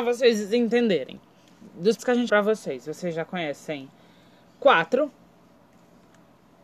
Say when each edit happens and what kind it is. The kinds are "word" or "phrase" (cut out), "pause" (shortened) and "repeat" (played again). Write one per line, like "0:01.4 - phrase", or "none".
0:02.0 - word
0:02.3 - word

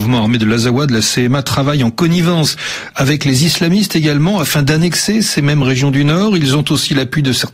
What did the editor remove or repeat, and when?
none

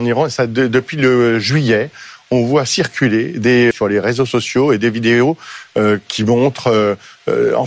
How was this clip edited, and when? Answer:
0:03.7 - phrase

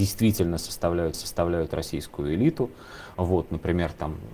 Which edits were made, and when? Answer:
0:01.1 - repeat

